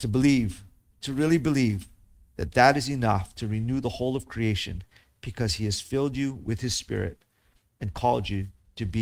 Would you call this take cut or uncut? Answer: uncut